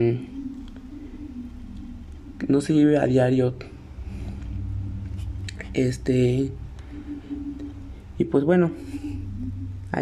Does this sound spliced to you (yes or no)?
no